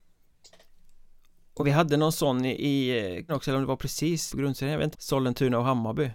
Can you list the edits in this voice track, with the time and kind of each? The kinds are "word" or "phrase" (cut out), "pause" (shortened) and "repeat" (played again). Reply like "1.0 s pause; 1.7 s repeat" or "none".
1.6 s word; 3.3 s word; 4.3 s word; 4.9 s word